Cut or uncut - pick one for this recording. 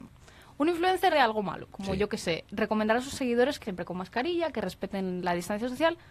cut